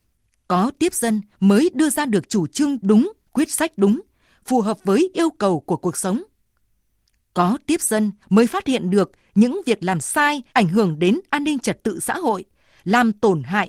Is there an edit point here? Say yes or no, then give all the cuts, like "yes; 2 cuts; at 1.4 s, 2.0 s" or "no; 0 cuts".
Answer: yes; 3 cuts; at 1.3 s, 8.2 s, 10.5 s